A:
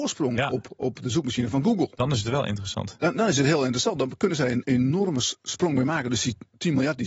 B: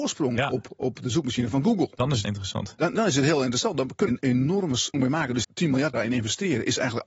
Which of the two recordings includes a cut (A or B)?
B